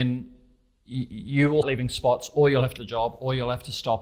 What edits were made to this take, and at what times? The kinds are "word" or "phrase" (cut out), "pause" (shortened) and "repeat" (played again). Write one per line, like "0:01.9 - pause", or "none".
0:01.6 - word
0:02.8 - word